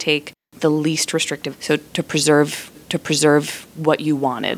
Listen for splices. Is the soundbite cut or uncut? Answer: cut